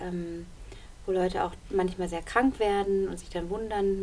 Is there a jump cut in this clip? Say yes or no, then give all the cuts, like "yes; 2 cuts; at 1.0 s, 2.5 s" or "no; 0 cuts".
no; 0 cuts